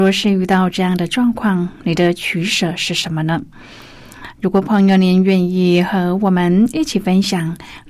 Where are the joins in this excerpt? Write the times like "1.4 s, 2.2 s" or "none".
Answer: none